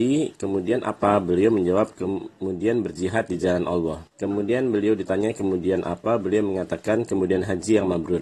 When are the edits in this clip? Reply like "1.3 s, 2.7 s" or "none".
4.1 s